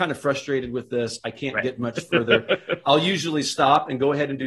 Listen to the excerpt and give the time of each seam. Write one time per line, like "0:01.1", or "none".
none